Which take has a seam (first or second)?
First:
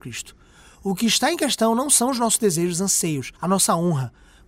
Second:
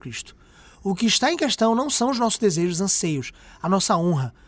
first